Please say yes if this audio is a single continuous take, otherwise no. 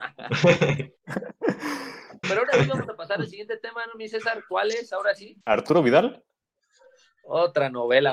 no